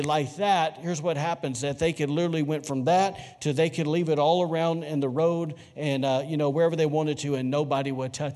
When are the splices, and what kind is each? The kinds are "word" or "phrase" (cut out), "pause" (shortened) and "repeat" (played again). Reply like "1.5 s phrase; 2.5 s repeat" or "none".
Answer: none